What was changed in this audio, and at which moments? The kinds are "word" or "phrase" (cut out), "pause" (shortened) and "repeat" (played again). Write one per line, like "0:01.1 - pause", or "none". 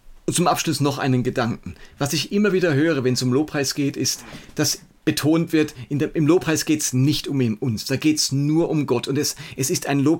none